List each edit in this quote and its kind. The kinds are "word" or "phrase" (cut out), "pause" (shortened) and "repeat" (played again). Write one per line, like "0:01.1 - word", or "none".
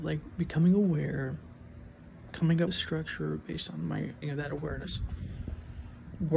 0:02.7 - word
0:04.2 - word